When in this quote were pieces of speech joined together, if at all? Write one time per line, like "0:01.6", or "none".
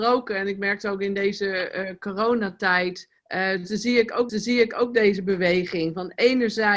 0:03.2
0:04.3